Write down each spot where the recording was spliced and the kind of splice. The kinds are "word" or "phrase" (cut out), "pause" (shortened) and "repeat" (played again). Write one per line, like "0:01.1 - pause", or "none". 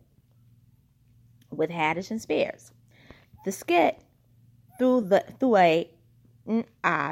none